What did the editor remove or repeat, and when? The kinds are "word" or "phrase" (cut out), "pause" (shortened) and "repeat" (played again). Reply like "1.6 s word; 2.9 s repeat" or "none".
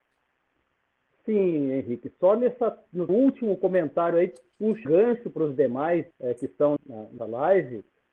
3.1 s word; 4.8 s word; 6.1 s pause; 6.8 s word; 7.2 s word